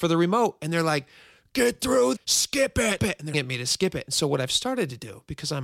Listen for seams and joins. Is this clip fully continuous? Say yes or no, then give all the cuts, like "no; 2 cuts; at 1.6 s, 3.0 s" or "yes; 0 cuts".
no; 3 cuts; at 2.1 s, 3.0 s, 3.3 s